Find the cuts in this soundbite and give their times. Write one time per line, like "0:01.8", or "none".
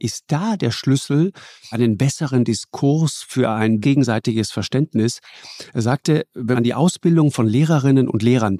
0:01.7
0:03.8
0:06.5